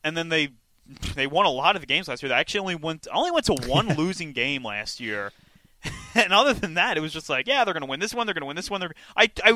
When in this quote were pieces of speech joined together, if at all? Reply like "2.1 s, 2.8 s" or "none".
none